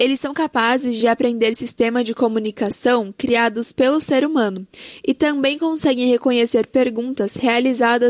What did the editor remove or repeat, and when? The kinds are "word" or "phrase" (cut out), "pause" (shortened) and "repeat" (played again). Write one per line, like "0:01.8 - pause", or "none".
none

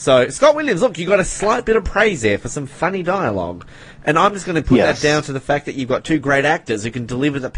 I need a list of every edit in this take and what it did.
none

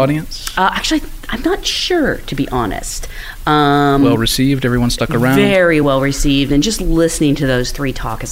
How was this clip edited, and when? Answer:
none

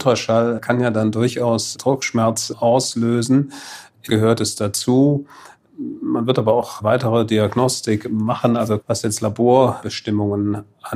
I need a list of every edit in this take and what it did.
0:04.1 - phrase
0:08.8 - word

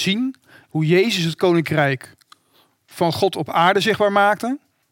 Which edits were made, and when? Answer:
none

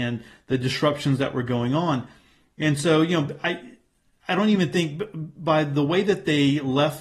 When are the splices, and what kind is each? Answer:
none

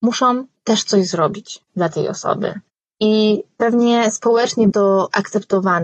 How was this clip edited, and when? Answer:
0:04.7 - word

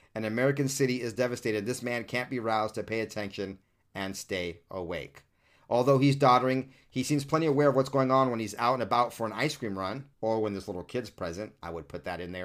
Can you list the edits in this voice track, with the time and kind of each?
0:10.1 - pause

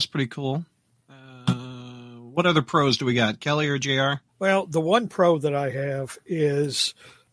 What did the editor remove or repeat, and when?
0:04.3 - pause

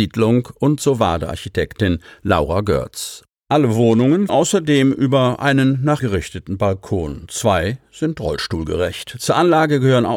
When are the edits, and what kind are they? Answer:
0:04.3 - word
0:06.0 - word

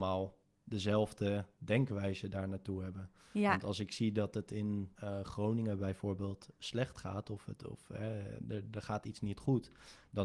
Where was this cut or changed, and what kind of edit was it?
0:04.9 - pause

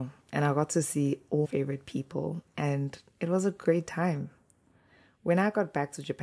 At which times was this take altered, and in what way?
0:01.4 - word

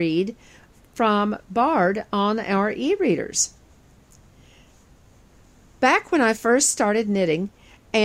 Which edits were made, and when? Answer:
none

